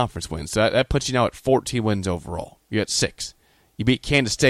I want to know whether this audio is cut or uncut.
uncut